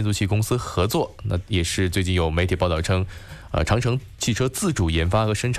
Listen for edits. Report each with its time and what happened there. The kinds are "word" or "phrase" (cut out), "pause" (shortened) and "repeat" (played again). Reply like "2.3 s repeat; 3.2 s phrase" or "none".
none